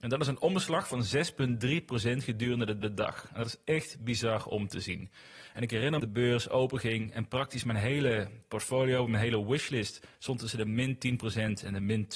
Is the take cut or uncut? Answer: cut